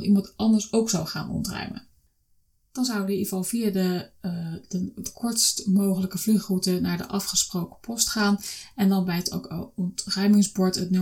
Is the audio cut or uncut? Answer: uncut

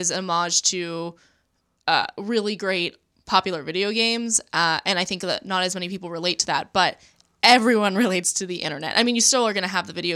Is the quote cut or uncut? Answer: uncut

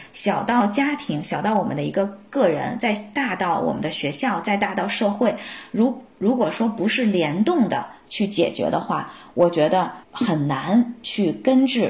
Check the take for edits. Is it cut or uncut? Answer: cut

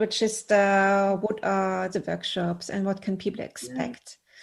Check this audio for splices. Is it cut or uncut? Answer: cut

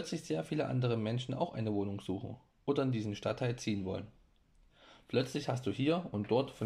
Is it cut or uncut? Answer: uncut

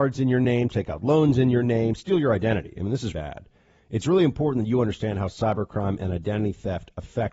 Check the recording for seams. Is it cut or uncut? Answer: cut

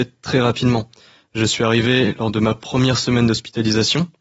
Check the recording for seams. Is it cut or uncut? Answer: uncut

